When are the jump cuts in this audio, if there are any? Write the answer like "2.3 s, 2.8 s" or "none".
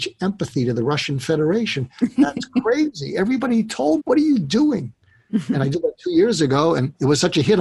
4.0 s

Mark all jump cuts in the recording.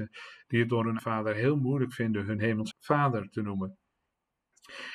1.0 s, 2.7 s

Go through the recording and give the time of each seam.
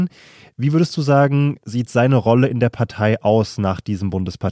none

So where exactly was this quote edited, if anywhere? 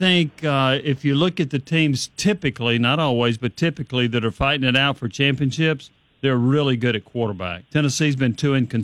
6.0 s, 7.7 s

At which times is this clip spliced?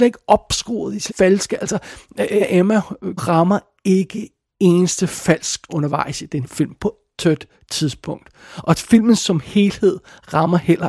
1.1 s, 2.4 s, 3.2 s, 4.5 s, 5.7 s, 6.4 s, 7.1 s

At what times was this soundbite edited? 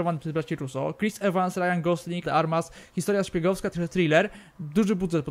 2.2 s, 3.7 s

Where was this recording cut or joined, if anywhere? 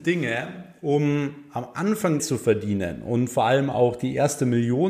2.2 s

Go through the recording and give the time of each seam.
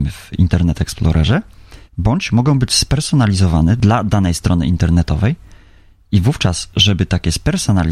1.9 s

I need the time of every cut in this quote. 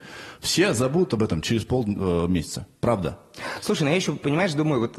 none

